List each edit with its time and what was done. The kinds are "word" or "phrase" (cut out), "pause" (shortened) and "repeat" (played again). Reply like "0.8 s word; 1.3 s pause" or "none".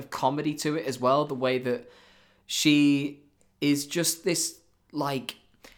none